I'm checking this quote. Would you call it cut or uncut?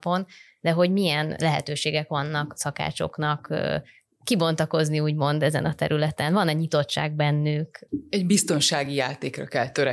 uncut